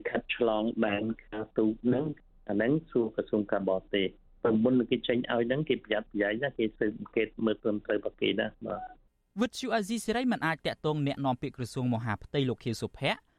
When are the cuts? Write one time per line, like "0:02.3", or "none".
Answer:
none